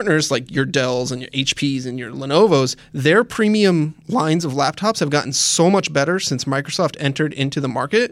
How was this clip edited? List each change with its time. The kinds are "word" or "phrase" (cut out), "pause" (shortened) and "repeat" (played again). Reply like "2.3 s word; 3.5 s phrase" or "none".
none